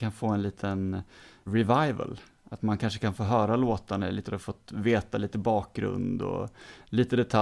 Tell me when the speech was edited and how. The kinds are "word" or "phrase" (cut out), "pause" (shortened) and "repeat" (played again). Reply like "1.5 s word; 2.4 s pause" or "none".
1.5 s word; 4.3 s phrase